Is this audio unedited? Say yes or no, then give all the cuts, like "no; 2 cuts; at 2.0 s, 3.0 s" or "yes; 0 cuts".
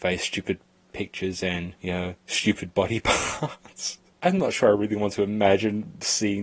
yes; 0 cuts